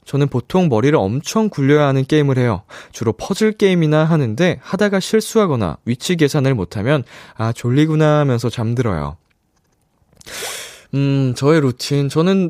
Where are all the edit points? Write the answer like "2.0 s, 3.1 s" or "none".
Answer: none